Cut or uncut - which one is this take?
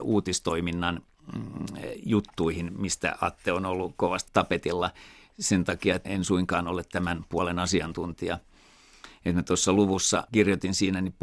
cut